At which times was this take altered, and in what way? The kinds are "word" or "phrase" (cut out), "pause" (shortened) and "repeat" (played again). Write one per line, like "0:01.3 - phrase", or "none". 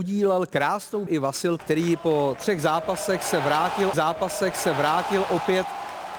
0:01.1 - word
0:01.6 - word
0:03.9 - repeat